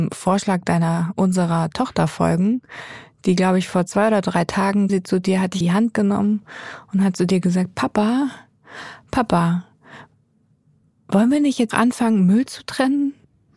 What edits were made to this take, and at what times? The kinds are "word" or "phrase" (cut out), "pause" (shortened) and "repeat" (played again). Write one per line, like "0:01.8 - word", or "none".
0:04.9 - word
0:05.6 - word
0:11.7 - word